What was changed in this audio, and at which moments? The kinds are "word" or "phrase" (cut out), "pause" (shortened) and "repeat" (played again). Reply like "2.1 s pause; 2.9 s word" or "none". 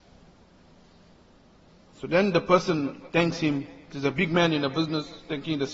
3.8 s pause